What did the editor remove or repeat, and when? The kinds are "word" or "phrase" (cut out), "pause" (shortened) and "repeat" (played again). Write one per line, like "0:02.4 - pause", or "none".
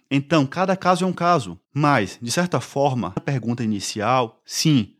0:03.2 - word